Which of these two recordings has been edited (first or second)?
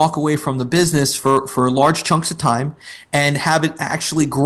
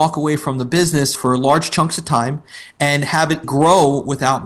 second